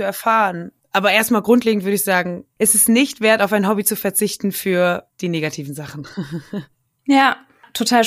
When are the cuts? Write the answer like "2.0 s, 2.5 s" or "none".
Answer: none